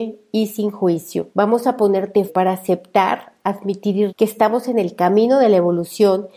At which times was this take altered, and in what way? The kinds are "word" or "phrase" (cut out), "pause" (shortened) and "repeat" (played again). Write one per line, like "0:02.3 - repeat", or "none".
0:01.3 - pause
0:02.3 - word
0:04.1 - word